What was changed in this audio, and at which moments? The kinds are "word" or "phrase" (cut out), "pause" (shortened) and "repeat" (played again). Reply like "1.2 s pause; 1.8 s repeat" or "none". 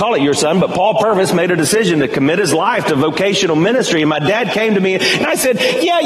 none